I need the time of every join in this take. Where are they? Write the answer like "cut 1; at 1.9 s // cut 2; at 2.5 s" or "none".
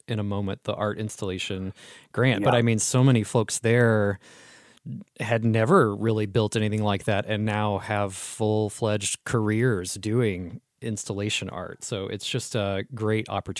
none